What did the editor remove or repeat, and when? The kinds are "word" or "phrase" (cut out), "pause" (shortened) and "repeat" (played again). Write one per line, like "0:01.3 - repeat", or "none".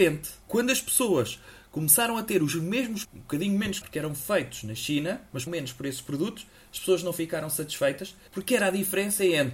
0:03.0 - word
0:03.8 - word
0:05.5 - word